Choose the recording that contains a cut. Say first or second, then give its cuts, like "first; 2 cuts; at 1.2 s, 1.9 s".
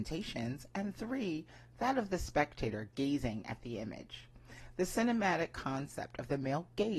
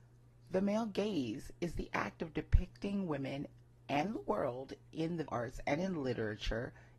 second; 1 cut; at 5.3 s